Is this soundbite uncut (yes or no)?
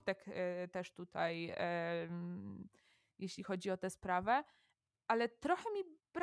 yes